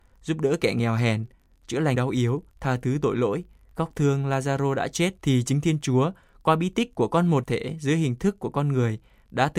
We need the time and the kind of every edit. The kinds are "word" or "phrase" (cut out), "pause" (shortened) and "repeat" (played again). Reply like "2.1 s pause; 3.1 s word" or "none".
1.9 s word; 2.5 s pause; 5.2 s pause; 7.4 s word